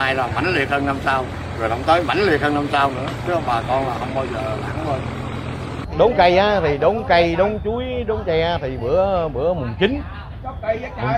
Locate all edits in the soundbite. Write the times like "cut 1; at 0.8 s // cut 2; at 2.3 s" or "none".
none